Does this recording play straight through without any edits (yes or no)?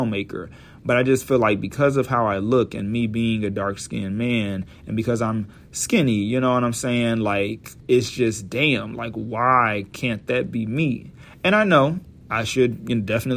no